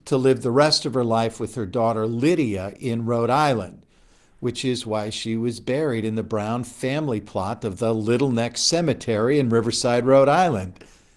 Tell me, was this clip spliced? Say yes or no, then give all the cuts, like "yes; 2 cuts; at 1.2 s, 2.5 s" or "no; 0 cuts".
no; 0 cuts